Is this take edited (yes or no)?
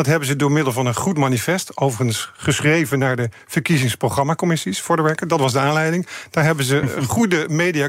no